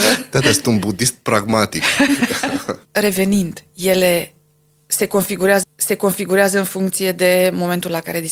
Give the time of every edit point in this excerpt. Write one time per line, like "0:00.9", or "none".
0:05.6